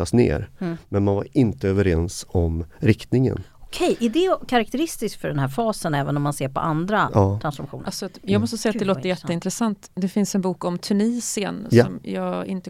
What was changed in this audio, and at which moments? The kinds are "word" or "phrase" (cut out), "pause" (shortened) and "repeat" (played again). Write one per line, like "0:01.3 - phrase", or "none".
none